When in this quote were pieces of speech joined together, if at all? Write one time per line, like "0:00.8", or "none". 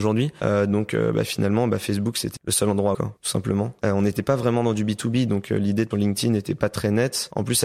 0:02.4
0:02.9
0:05.9